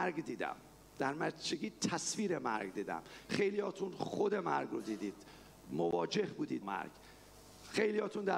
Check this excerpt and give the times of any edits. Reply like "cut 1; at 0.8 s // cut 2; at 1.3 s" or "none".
cut 1; at 6.6 s